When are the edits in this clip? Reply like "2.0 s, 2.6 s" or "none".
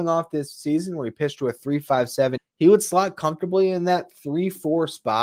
2.4 s